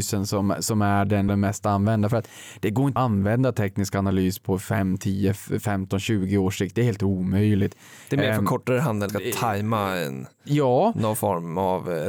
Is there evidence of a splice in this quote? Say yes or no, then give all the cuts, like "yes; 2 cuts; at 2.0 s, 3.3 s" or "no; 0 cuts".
yes; 3 cuts; at 1.3 s, 3.0 s, 9.1 s